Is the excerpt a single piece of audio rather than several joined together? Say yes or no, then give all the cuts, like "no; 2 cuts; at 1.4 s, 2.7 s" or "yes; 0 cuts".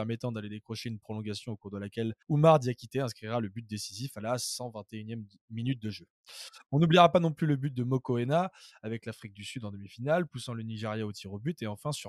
no; 1 cut; at 2.2 s